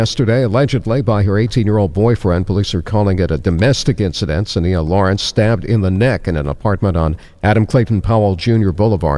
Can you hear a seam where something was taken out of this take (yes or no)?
no